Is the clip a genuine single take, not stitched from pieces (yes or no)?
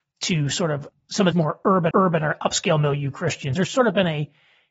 no